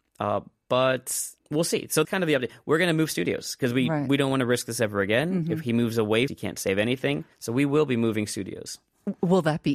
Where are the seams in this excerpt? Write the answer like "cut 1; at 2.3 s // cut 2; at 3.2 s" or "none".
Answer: cut 1; at 1.4 s // cut 2; at 2.0 s // cut 3; at 6.3 s // cut 4; at 7.3 s